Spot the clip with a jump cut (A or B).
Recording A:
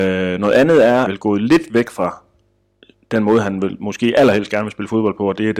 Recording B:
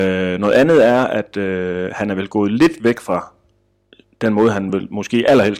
A